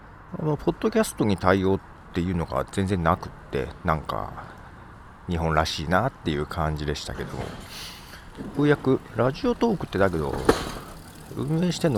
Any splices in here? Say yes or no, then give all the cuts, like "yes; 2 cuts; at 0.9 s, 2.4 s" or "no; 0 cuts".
no; 0 cuts